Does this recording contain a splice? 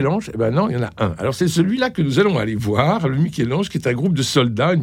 no; 0 cuts

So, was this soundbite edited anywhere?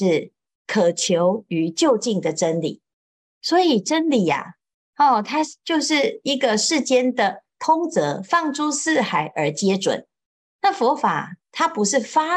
no; 0 cuts

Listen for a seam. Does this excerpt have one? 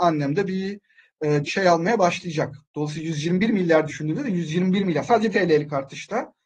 yes; 4 cuts; at 1.4 s, 2.6 s, 3.9 s, 5.3 s

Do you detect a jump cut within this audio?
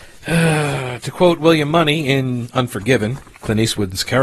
no; 0 cuts

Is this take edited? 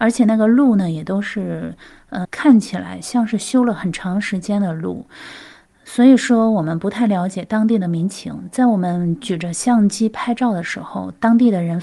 yes; 1 cut; at 2.2 s

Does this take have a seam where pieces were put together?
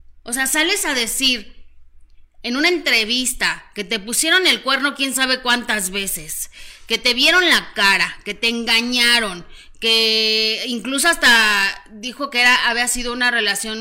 no; 0 cuts

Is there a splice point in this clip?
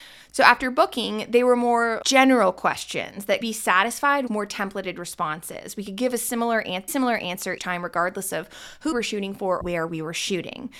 yes; 7 cuts; at 2.0 s, 3.4 s, 4.3 s, 6.9 s, 7.6 s, 8.9 s, 9.6 s

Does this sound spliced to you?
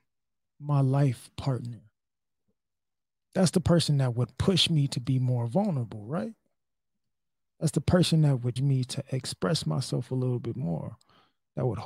yes; 1 cut; at 8.6 s

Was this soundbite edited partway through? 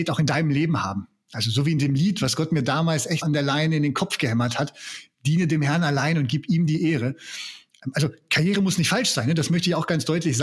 yes; 1 cut; at 3.2 s

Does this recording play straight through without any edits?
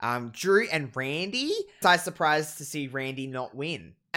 no; 1 cut; at 1.8 s

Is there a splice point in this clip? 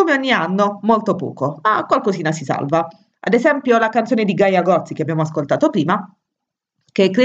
no; 0 cuts

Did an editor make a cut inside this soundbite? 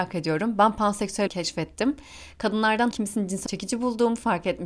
yes; 3 cuts; at 1.3 s, 2.9 s, 3.5 s

